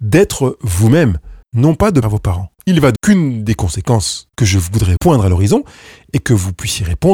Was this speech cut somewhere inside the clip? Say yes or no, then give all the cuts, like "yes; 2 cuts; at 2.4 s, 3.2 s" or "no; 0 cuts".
yes; 6 cuts; at 1.4 s, 2.0 s, 2.6 s, 3.0 s, 4.3 s, 5.0 s